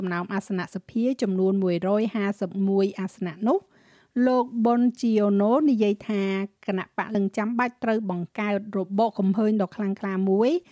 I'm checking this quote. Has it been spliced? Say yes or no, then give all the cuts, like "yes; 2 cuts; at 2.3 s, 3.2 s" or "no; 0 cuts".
yes; 1 cut; at 7.1 s